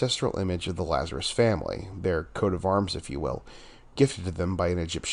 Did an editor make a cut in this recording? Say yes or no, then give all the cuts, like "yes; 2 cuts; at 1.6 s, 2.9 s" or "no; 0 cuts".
no; 0 cuts